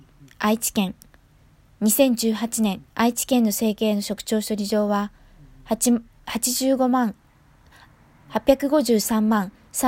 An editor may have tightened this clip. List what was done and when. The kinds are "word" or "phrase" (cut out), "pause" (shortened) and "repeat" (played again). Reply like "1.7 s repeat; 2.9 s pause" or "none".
2.9 s pause